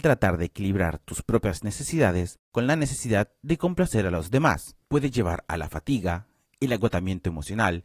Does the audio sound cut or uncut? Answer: uncut